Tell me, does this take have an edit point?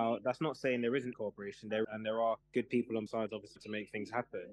yes; 5 cuts; at 1.1 s, 1.8 s, 2.4 s, 3.1 s, 3.6 s

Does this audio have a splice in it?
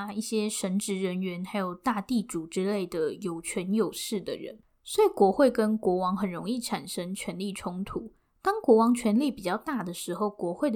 no; 0 cuts

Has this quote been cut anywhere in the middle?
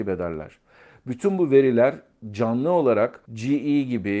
yes; 1 cut; at 3.2 s

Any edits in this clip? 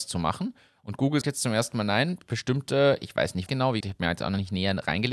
yes; 3 cuts; at 1.2 s, 3.5 s, 3.8 s

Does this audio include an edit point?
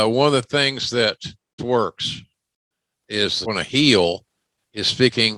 yes; 2 cuts; at 1.6 s, 3.4 s

